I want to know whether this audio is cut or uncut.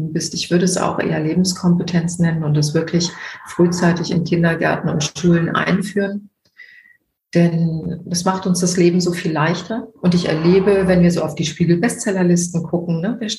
cut